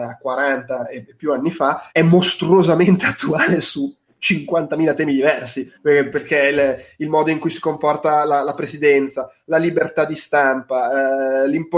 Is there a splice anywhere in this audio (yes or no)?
yes